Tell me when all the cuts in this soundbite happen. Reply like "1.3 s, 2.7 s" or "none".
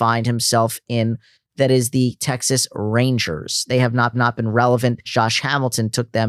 4.1 s, 5.1 s